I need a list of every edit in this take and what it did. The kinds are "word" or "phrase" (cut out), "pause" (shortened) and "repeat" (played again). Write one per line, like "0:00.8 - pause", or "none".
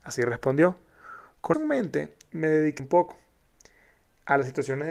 0:01.5 - word
0:02.8 - phrase